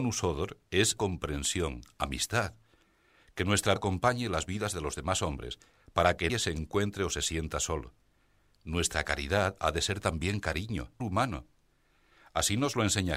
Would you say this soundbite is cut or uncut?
cut